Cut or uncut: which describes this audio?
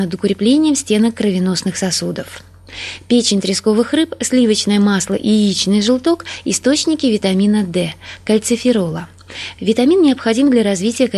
uncut